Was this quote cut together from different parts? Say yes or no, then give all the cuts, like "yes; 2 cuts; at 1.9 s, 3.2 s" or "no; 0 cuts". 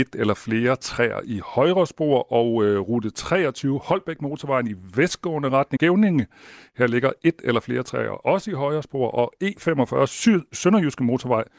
yes; 1 cut; at 5.8 s